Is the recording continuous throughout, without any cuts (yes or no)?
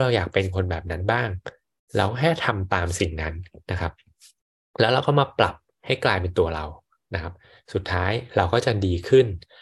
yes